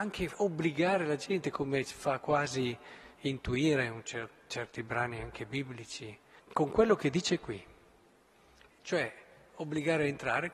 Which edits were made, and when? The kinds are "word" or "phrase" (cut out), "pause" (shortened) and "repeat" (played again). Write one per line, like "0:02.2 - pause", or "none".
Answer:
0:06.4 - word